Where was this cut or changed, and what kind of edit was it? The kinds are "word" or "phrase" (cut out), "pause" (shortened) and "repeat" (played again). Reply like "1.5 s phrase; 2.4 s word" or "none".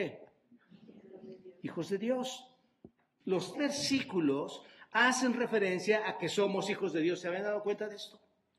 3.5 s word